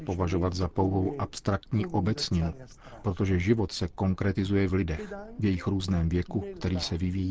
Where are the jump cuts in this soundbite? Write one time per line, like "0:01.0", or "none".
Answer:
none